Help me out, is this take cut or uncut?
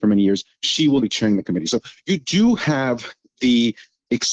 cut